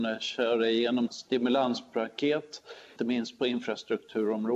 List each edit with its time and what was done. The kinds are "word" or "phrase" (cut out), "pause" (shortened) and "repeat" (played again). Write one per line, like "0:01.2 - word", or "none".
0:01.1 - word
0:03.0 - word